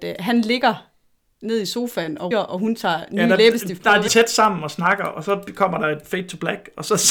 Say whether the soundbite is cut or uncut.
cut